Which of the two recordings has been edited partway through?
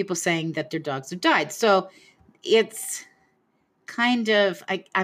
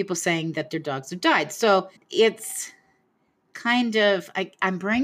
second; 1 cut; at 2.0 s

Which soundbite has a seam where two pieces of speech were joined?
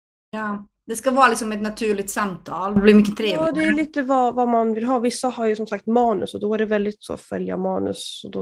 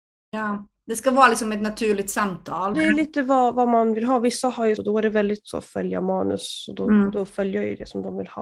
second; 2 cuts; at 2.7 s, 4.8 s

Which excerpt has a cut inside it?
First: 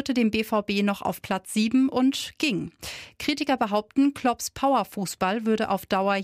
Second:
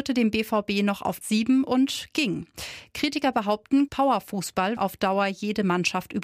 second; 3 cuts; at 1.2 s, 3.9 s, 4.8 s

